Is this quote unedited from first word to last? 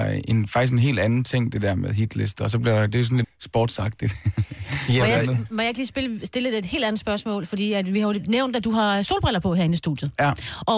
no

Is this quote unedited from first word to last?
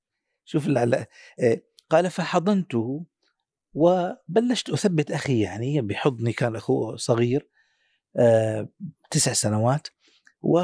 yes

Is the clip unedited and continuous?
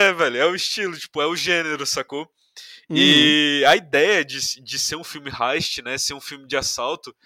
yes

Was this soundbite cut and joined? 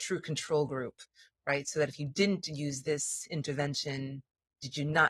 no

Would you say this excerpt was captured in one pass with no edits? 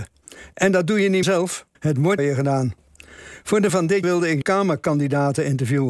no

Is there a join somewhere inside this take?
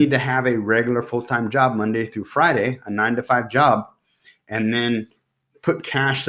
no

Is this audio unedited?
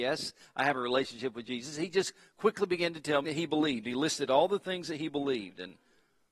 no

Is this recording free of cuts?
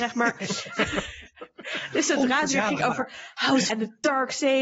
no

